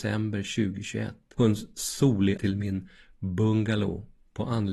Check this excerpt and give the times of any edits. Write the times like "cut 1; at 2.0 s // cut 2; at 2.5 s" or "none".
cut 1; at 1.4 s // cut 2; at 2.4 s